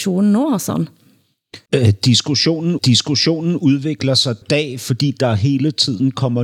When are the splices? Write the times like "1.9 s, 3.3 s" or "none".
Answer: 1.7 s, 2.8 s, 4.4 s